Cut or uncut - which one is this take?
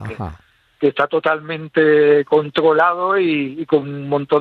uncut